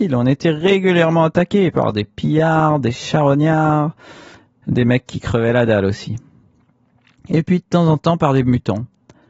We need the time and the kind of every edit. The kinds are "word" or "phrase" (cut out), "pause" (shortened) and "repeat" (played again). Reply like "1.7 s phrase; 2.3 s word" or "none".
none